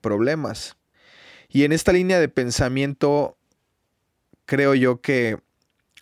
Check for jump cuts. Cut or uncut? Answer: uncut